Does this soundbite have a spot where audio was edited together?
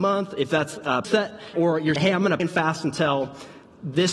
yes; 4 cuts; at 1.0 s, 1.5 s, 2.0 s, 2.4 s

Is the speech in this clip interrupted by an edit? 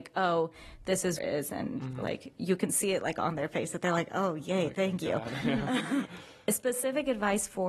yes; 2 cuts; at 1.2 s, 6.0 s

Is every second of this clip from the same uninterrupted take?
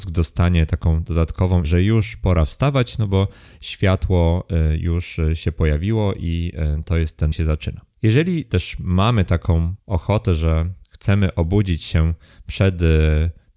no; 4 cuts; at 1.6 s, 7.3 s, 9.8 s, 10.8 s

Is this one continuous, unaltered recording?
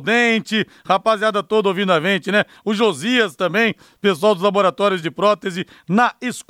yes; 0 cuts

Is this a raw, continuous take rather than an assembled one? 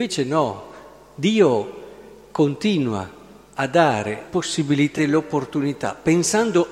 no; 2 cuts; at 4.2 s, 5.0 s

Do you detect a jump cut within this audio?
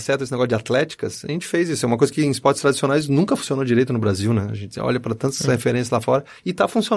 no; 0 cuts

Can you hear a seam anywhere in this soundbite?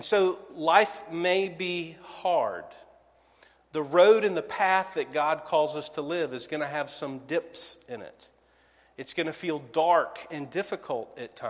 no; 0 cuts

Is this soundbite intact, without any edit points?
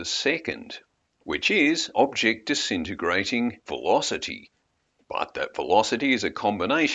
no; 2 cuts; at 1.9 s, 3.6 s

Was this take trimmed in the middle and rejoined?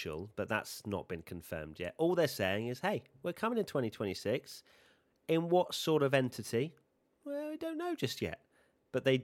no; 0 cuts

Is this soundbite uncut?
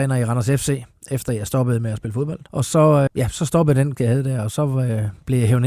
no; 3 cuts; at 2.5 s, 3.1 s, 4.0 s

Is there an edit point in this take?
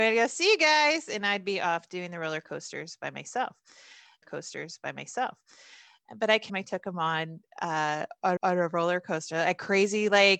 yes; 3 cuts; at 4.2 s, 6.5 s, 8.4 s

